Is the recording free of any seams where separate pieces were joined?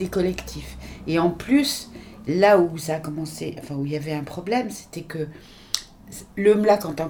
yes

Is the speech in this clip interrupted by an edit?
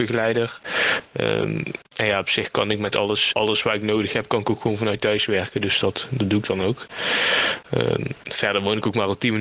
yes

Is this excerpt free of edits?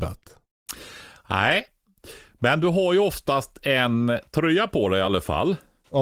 yes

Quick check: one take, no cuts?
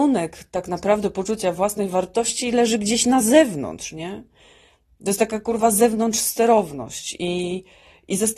yes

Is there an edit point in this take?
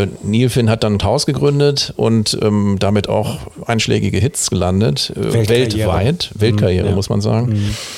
yes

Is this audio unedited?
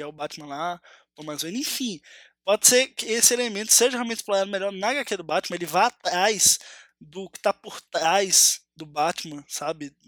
yes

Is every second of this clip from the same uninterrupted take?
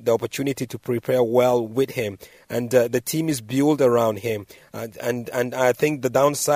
yes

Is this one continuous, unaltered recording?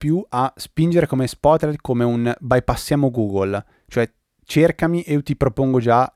yes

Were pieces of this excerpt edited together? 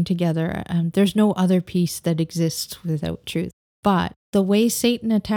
no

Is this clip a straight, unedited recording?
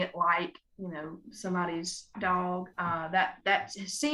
no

